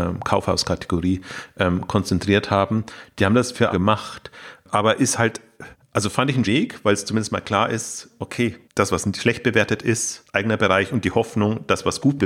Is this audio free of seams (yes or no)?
no